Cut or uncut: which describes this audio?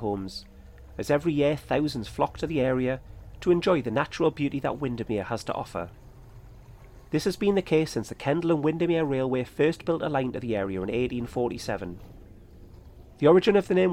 uncut